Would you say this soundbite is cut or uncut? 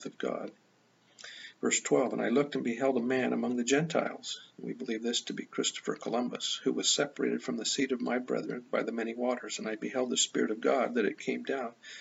uncut